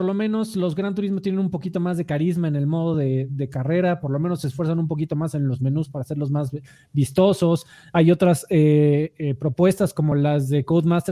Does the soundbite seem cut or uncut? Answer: uncut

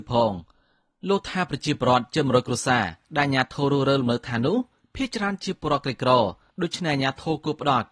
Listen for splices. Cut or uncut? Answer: uncut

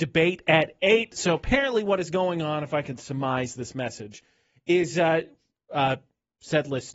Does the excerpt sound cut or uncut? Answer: uncut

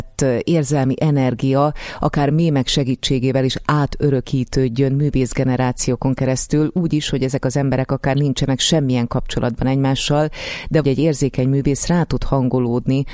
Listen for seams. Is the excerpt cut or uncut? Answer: cut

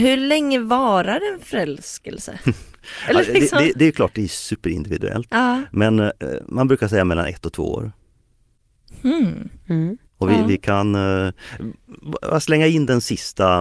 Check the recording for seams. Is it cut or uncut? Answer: cut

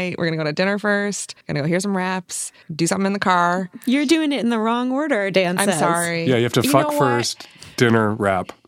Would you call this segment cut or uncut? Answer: cut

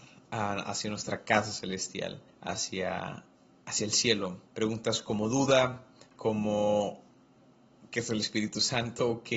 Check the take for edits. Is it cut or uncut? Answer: cut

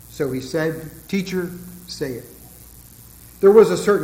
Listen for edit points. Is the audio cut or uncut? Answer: cut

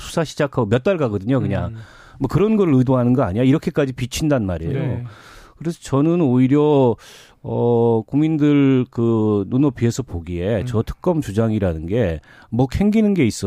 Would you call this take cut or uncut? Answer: uncut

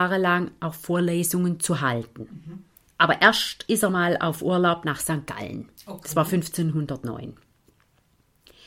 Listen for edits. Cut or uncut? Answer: uncut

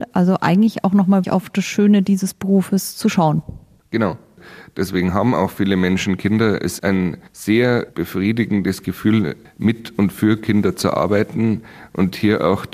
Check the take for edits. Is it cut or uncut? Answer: cut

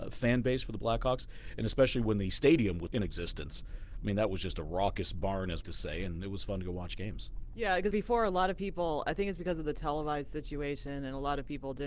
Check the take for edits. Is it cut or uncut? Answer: cut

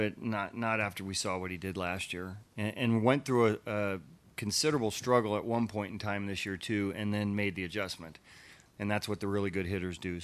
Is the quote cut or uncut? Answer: uncut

